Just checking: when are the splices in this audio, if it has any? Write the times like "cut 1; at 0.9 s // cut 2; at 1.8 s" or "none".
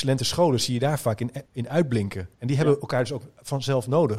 cut 1; at 1.5 s // cut 2; at 2.3 s